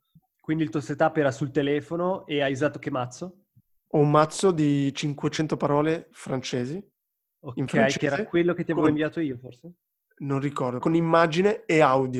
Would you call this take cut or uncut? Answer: cut